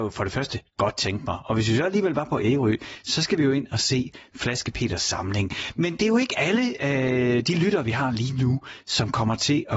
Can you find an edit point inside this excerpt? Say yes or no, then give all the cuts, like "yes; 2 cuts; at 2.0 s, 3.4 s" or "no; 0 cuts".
no; 0 cuts